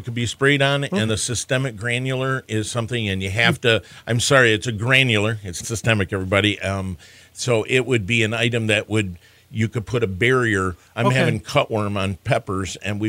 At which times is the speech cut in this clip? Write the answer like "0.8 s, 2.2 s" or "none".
1.1 s, 5.6 s